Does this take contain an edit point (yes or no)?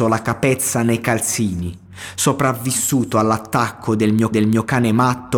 yes